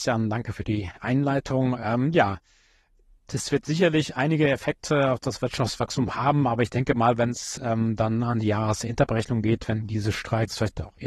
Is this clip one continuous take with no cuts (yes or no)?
yes